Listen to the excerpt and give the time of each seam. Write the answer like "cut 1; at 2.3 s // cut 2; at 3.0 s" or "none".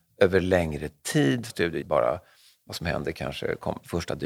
cut 1; at 1.5 s // cut 2; at 1.8 s